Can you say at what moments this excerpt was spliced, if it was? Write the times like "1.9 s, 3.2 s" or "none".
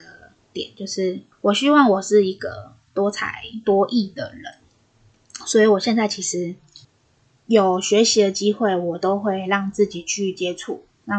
1.3 s, 6.8 s